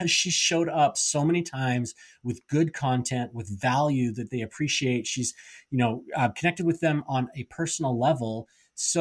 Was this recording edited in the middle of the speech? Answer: no; 0 cuts

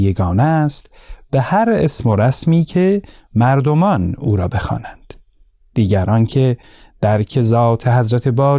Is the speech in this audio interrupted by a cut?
no; 0 cuts

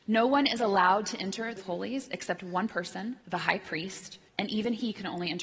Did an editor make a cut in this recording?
yes; 3 cuts; at 1.6 s, 3.2 s, 4.3 s

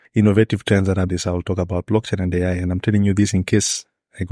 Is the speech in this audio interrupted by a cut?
yes; 1 cut; at 1.1 s

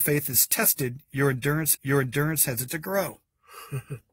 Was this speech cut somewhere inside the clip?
yes; 2 cuts; at 1.7 s, 2.7 s

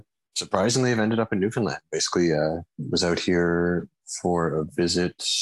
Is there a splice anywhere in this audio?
no; 0 cuts

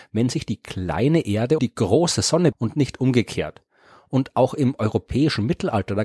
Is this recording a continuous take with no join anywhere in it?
no; 2 cuts; at 1.6 s, 2.5 s

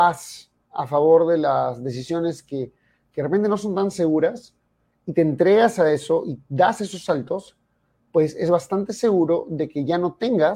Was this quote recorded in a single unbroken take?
yes; 0 cuts

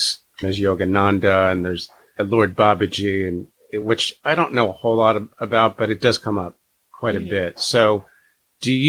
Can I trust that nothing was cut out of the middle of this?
yes; 0 cuts

